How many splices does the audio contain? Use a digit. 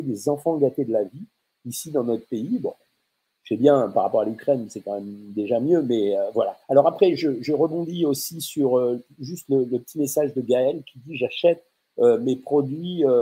1